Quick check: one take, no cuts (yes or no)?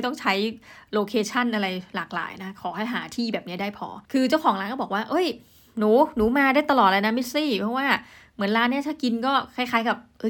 yes